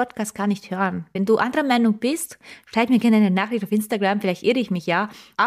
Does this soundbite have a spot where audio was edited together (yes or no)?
no